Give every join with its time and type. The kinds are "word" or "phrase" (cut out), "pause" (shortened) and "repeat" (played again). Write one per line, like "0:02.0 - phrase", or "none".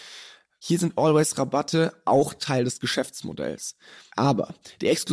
none